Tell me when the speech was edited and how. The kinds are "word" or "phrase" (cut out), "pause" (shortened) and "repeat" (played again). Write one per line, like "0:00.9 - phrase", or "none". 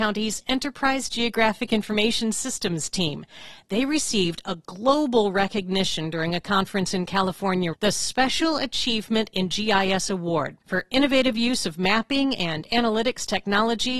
0:07.7 - word
0:10.6 - pause